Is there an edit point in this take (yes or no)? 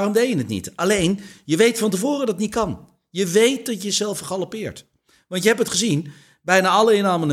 no